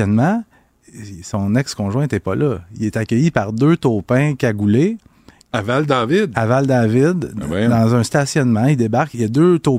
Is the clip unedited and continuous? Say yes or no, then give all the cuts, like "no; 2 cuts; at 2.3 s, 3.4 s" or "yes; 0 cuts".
yes; 0 cuts